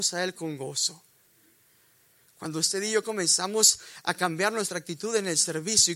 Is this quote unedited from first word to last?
yes; 0 cuts

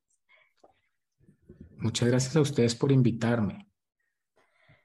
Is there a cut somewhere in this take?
no; 0 cuts

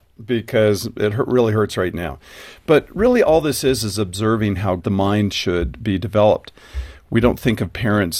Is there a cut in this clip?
no; 0 cuts

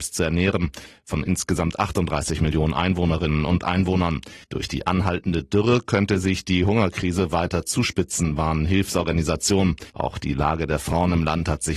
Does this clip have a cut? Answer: yes; 2 cuts; at 4.4 s, 9.9 s

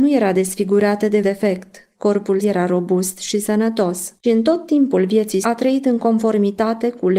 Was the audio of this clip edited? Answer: yes; 4 cuts; at 1.2 s, 2.4 s, 4.2 s, 5.4 s

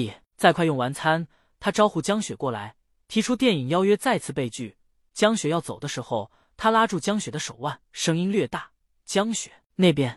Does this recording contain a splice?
yes; 1 cut; at 7.9 s

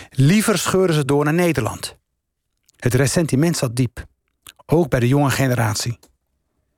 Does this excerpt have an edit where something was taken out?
no; 0 cuts

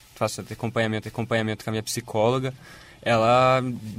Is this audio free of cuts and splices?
no; 1 cut; at 1.0 s

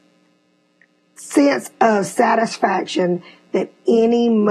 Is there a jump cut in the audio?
no; 0 cuts

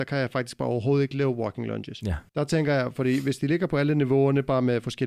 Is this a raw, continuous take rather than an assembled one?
no; 1 cut; at 2.3 s

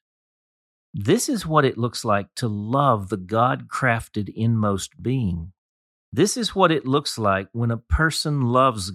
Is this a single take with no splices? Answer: yes; 0 cuts

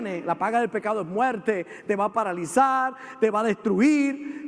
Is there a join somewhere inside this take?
no; 0 cuts

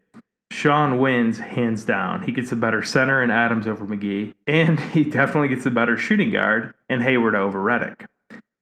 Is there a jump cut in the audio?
yes; 2 cuts; at 4.4 s, 6.8 s

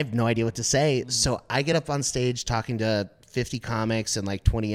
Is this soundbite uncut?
yes; 0 cuts

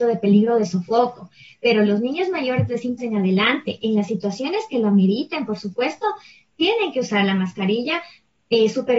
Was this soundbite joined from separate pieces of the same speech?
yes; 1 cut; at 3.0 s

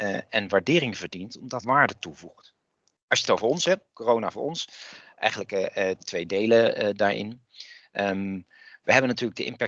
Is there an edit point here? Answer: yes; 4 cuts; at 1.6 s, 3.2 s, 3.9 s, 6.0 s

